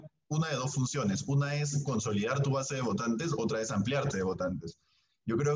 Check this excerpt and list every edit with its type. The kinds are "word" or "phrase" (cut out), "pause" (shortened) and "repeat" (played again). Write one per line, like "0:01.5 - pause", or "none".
0:04.1 - word